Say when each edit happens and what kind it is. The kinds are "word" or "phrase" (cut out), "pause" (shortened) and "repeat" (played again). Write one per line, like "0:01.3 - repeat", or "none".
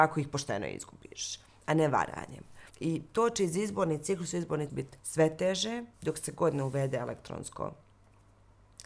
0:02.7 - pause
0:04.7 - word
0:05.0 - pause
0:05.9 - pause